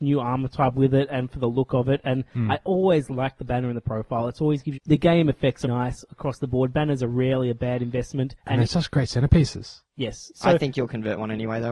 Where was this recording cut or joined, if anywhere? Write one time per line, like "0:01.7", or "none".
0:04.7
0:05.6
0:08.4